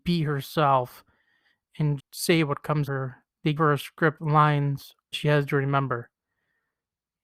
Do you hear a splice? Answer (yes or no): yes